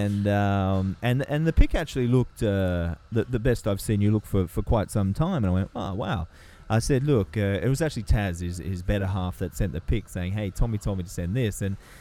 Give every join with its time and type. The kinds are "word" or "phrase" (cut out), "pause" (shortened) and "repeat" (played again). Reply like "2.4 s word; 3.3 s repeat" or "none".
none